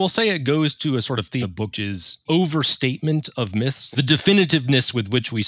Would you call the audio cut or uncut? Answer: cut